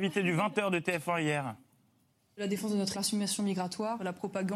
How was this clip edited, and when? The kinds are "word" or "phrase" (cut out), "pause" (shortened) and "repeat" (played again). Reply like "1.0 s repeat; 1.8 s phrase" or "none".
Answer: 2.9 s word